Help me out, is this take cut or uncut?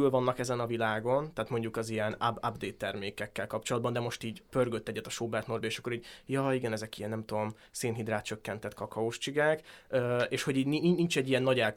uncut